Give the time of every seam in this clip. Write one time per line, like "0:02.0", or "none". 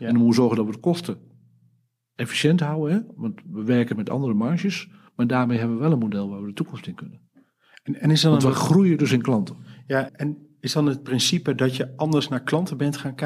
0:10.1